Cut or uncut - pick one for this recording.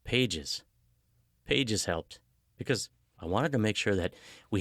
uncut